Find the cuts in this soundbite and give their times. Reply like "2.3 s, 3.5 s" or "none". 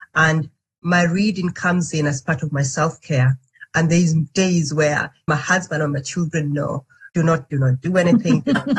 5.3 s, 7.1 s, 7.5 s